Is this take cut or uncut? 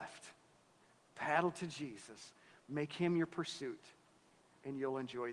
uncut